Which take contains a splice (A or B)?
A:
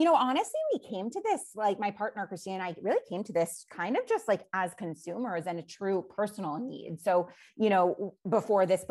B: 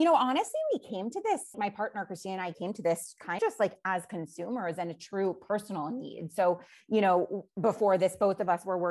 B